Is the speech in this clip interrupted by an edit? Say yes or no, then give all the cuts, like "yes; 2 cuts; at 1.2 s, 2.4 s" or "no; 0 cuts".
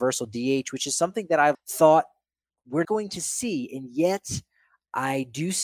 yes; 2 cuts; at 1.5 s, 2.8 s